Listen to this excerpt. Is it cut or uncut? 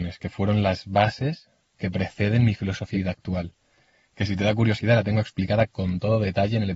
cut